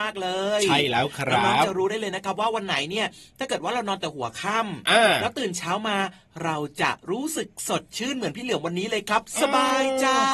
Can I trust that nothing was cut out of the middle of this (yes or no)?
yes